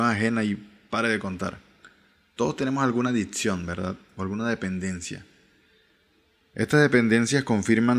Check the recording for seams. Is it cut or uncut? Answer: uncut